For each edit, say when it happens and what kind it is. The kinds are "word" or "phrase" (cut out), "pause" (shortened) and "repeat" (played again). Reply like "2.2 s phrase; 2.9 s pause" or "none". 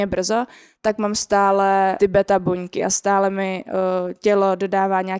2.0 s phrase